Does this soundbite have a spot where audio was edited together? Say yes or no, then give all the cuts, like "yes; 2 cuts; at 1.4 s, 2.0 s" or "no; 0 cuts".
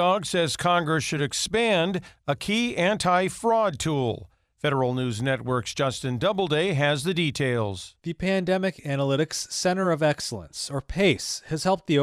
no; 0 cuts